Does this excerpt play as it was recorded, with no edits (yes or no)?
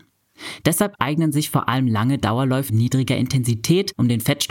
no